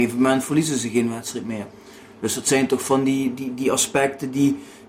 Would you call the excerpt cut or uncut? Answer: uncut